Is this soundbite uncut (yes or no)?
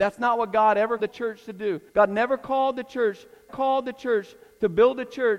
no